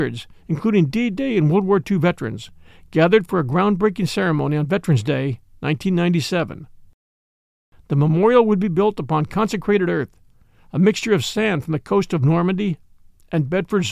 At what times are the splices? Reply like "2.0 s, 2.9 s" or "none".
none